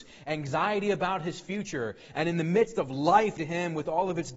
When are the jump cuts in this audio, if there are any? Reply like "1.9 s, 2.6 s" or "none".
3.4 s